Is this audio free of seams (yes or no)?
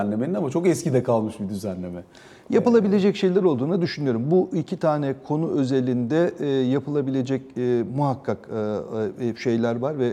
yes